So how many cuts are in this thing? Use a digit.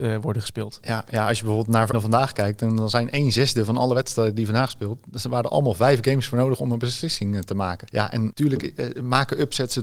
1